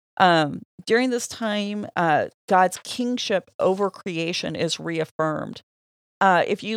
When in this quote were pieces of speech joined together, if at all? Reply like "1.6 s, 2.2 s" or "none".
none

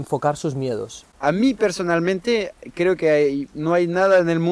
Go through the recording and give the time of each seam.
none

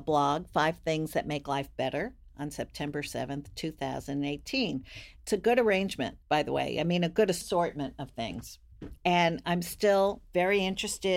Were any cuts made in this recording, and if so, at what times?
6.2 s

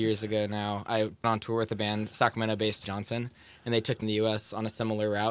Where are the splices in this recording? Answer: 1.2 s, 2.8 s, 4.0 s

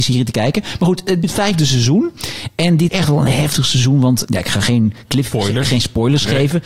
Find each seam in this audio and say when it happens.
1.2 s, 2.9 s, 3.3 s, 4.2 s

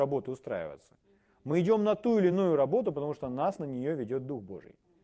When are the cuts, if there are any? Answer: none

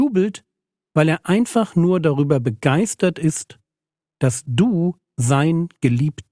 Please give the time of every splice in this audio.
none

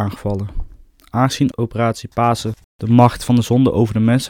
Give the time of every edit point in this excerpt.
none

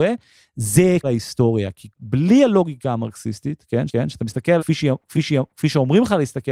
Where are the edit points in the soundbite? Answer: 1.0 s, 3.9 s, 4.6 s, 5.1 s

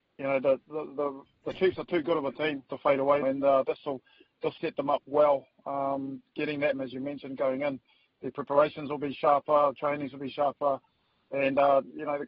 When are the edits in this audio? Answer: 2.7 s, 3.2 s, 4.6 s, 6.7 s

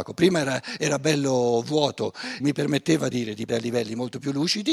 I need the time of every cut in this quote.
2.4 s, 3.1 s, 3.5 s

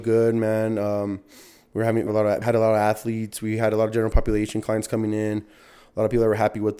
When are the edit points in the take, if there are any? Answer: 2.1 s, 2.4 s

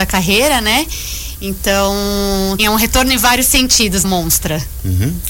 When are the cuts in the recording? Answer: 2.6 s, 4.0 s

